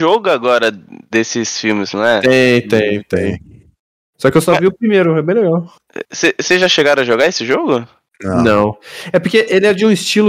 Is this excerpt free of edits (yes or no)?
yes